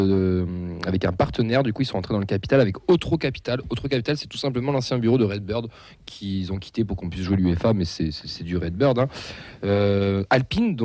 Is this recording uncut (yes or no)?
yes